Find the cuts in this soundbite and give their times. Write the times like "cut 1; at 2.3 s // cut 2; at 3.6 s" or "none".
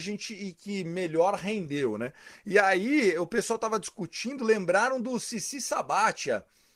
none